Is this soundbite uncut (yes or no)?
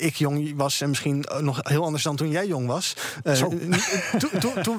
yes